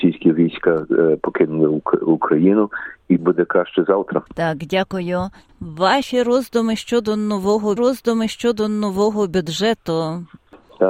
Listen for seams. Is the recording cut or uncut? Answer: cut